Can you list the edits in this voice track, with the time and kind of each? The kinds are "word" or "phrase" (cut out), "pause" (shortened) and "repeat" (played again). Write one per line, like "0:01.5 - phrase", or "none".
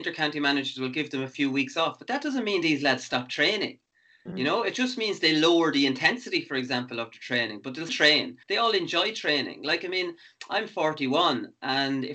0:07.9 - word
0:08.4 - pause